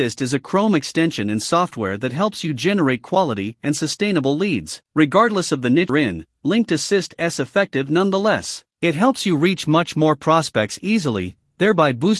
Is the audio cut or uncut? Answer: cut